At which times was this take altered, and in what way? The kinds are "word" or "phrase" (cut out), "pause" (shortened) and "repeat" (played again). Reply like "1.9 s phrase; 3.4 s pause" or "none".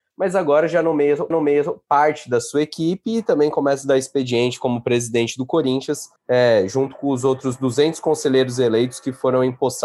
1.3 s repeat; 6.2 s pause